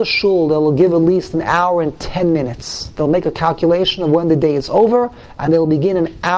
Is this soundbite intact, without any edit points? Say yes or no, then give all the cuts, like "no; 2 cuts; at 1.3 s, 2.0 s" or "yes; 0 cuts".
yes; 0 cuts